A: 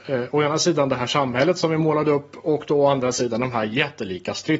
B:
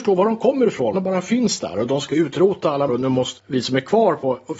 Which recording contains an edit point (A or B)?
B